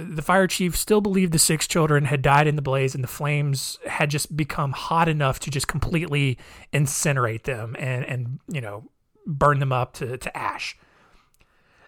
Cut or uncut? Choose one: uncut